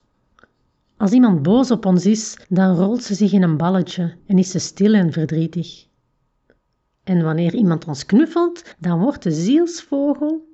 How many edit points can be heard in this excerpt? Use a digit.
4